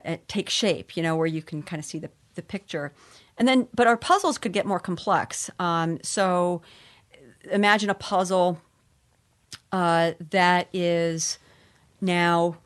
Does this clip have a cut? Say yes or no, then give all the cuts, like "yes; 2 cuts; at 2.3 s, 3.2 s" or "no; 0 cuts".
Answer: no; 0 cuts